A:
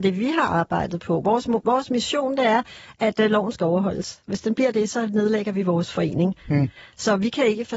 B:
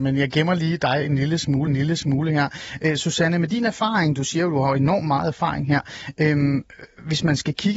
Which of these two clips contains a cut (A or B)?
B